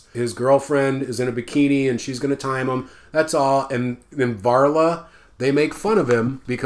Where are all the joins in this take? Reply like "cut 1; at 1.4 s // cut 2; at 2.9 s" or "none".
none